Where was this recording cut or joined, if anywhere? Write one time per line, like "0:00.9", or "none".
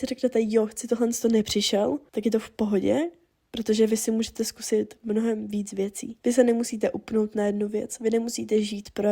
none